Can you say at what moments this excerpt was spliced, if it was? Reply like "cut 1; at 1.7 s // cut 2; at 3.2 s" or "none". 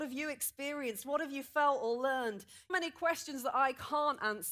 cut 1; at 2.7 s